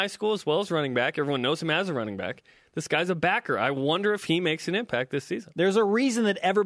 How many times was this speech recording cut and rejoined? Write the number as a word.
zero